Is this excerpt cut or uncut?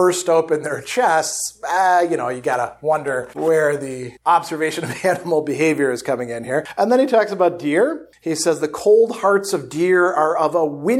cut